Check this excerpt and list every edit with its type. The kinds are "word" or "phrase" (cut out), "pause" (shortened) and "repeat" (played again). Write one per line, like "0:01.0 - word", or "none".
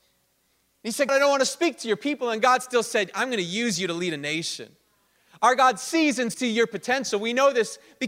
0:01.1 - word
0:06.3 - word